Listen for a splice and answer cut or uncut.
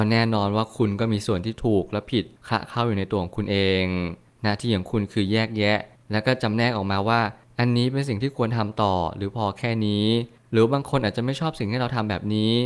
uncut